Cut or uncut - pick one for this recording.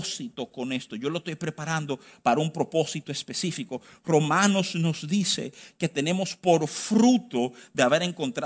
uncut